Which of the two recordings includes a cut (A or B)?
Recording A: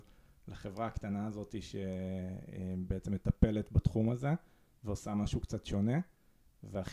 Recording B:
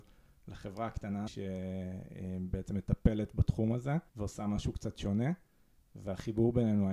B